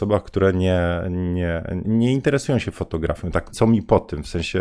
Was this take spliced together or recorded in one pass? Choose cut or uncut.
cut